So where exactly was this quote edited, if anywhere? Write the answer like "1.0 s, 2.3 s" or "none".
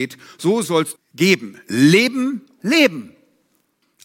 1.0 s, 2.6 s